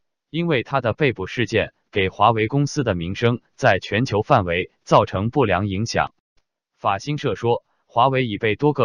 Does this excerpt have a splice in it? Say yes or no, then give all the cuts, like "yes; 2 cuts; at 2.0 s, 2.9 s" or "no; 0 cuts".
no; 0 cuts